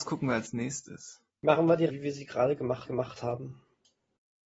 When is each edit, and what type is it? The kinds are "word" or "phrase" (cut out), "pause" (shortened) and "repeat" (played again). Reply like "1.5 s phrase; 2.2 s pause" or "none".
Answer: 1.3 s pause; 1.9 s word; 2.9 s repeat